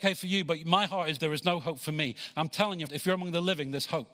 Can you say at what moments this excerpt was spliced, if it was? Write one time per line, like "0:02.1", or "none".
0:01.2
0:02.9